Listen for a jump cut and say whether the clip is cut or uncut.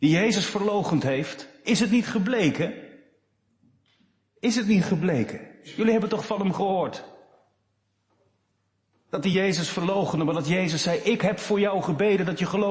uncut